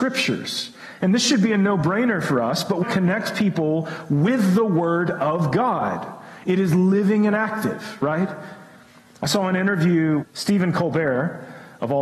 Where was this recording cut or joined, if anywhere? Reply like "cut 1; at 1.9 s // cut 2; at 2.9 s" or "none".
cut 1; at 2.8 s // cut 2; at 10.2 s